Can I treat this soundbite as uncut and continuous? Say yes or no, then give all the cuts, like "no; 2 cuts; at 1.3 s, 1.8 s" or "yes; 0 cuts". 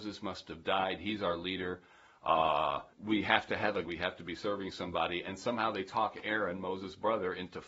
no; 2 cuts; at 2.9 s, 3.8 s